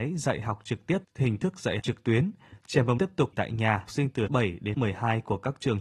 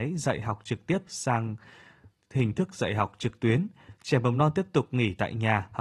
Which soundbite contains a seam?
first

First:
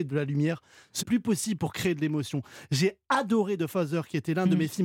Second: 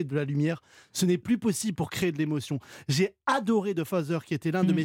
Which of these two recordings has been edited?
first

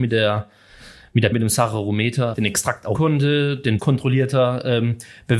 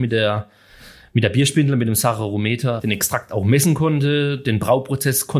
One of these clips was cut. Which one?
first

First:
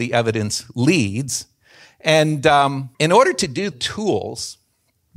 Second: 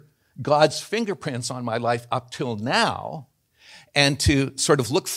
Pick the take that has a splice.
first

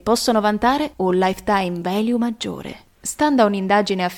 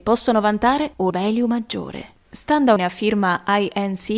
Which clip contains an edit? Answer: second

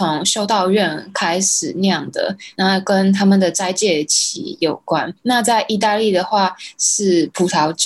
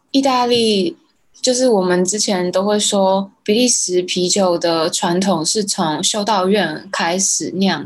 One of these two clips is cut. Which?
first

